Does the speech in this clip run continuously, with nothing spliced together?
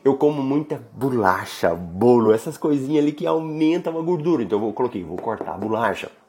yes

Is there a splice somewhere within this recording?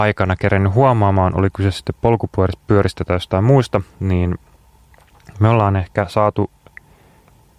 no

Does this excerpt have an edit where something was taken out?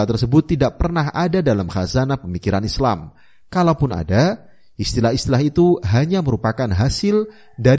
no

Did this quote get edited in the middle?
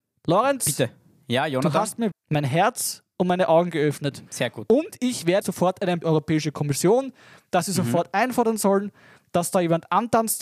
yes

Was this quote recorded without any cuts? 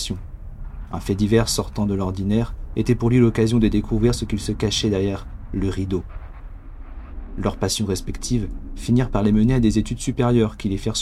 yes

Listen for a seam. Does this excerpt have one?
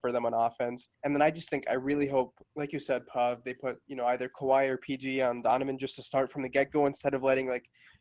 yes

